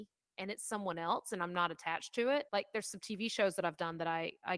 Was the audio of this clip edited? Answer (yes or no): yes